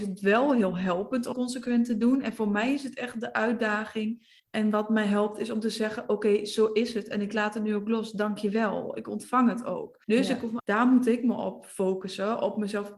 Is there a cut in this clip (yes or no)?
yes